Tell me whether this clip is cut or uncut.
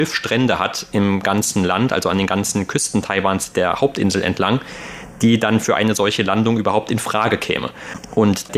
uncut